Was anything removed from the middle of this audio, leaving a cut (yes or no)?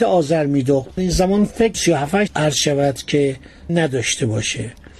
yes